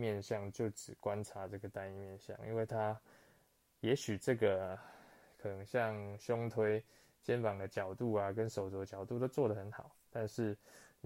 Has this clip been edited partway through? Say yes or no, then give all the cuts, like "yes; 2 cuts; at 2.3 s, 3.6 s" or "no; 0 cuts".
no; 0 cuts